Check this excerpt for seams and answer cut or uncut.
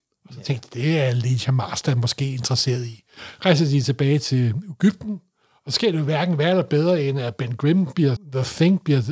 cut